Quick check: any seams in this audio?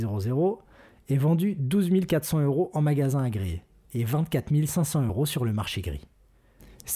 no; 0 cuts

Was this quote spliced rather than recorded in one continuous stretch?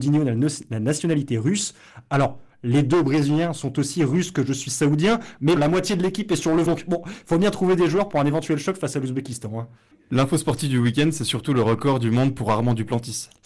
yes; 2 cuts; at 5.6 s, 6.7 s

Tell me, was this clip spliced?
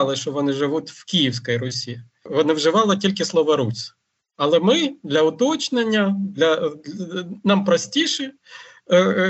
no; 0 cuts

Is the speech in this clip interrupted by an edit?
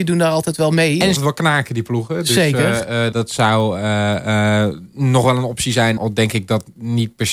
yes; 3 cuts; at 1.2 s, 3.1 s, 6.0 s

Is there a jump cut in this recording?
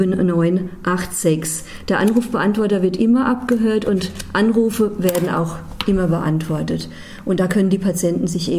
no; 0 cuts

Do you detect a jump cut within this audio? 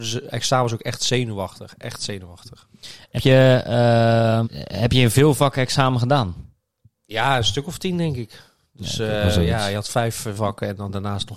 yes; 3 cuts; at 3.2 s, 4.4 s, 10.3 s

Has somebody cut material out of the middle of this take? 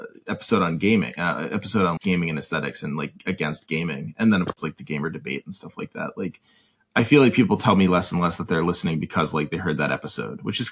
yes; 1 cut; at 2.0 s

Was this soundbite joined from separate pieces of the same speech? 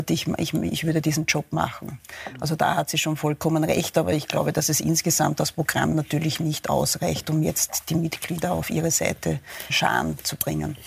yes; 1 cut; at 9.7 s

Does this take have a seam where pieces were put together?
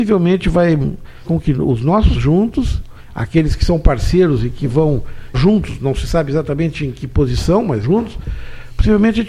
yes; 4 cuts; at 1.2 s, 2.1 s, 5.3 s, 7.8 s

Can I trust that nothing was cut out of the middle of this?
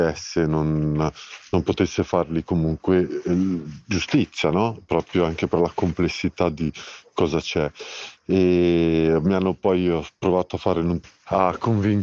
yes; 0 cuts

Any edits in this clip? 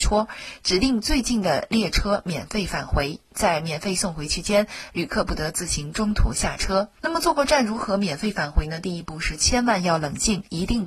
yes; 1 cut; at 7.0 s

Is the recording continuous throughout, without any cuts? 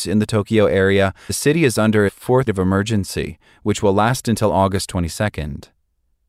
no; 3 cuts; at 1.3 s, 2.1 s, 2.5 s

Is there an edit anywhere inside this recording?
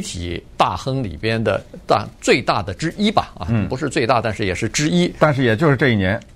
no; 0 cuts

